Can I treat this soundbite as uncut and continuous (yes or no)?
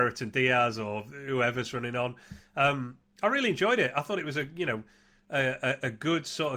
yes